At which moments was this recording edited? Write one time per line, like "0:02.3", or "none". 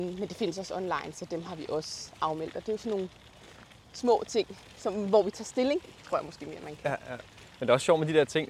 none